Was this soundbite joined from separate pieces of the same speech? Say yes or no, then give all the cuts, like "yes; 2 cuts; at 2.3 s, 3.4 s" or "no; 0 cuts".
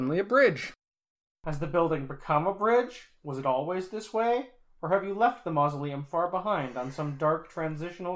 no; 0 cuts